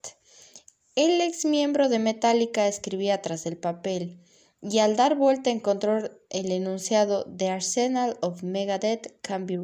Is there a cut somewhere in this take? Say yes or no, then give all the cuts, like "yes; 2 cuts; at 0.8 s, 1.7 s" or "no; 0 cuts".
no; 0 cuts